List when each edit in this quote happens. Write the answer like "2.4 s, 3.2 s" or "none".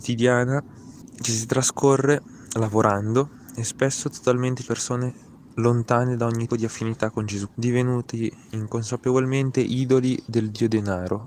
4.6 s, 6.5 s, 7.5 s

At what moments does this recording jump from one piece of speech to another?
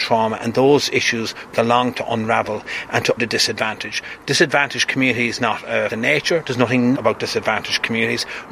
1.5 s, 1.9 s, 3.2 s, 5.4 s, 5.9 s, 6.9 s

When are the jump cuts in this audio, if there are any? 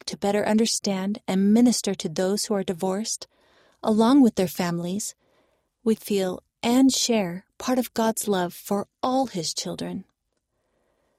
6.0 s

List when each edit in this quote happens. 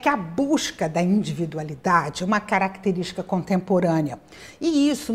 none

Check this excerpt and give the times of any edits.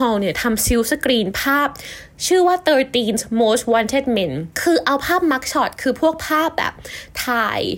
4.5 s

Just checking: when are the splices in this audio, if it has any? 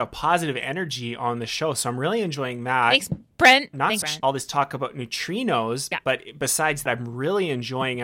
4.0 s, 5.9 s, 6.9 s

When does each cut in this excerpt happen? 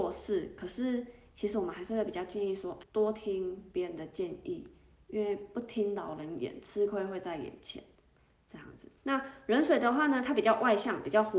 2.8 s, 9.0 s

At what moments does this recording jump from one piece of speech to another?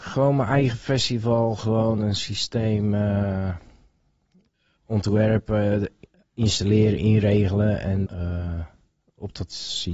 8.0 s

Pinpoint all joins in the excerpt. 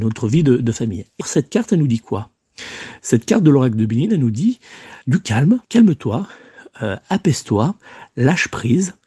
1.2 s, 5.0 s, 5.6 s

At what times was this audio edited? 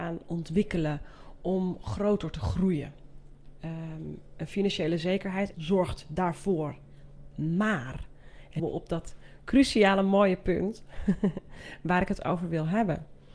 5.5 s, 8.6 s

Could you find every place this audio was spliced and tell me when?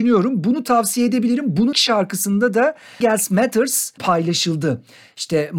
1.7 s, 3.0 s, 4.0 s

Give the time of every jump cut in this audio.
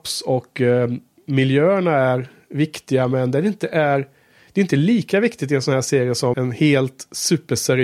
6.3 s

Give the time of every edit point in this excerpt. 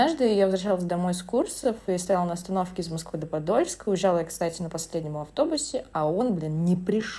none

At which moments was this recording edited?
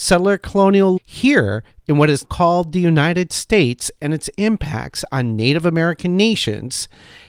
1.0 s, 2.2 s

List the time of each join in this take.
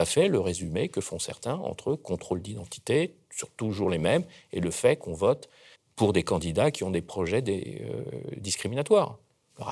5.8 s

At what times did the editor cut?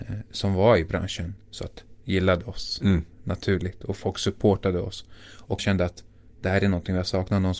2.0 s, 5.6 s

